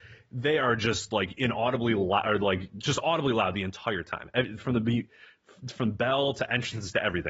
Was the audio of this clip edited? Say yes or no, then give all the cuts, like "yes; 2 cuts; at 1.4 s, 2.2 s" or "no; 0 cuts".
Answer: no; 0 cuts